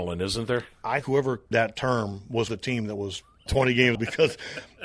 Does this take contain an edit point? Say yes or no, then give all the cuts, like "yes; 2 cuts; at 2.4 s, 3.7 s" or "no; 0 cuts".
yes; 5 cuts; at 1.0 s, 1.5 s, 2.5 s, 3.5 s, 3.9 s